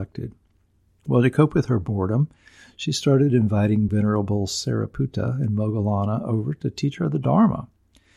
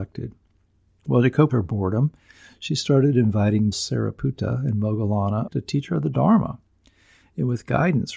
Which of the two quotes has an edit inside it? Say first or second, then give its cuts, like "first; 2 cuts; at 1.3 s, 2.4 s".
second; 3 cuts; at 1.5 s, 3.7 s, 5.5 s